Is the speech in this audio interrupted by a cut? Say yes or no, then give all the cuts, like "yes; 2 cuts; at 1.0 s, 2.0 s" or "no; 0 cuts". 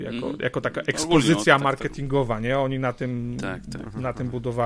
no; 0 cuts